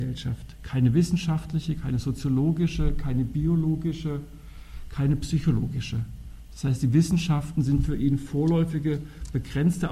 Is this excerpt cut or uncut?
uncut